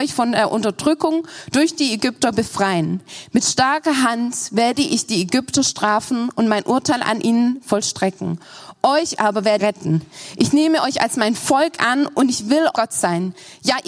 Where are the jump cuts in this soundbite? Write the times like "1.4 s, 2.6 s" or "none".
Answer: 9.6 s, 12.7 s